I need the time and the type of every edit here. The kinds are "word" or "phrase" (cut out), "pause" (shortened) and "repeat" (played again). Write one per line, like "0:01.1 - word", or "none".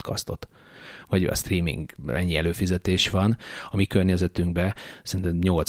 none